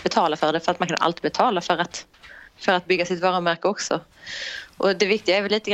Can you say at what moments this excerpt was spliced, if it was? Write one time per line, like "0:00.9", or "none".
0:02.5